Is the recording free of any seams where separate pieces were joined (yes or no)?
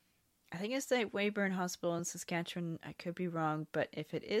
yes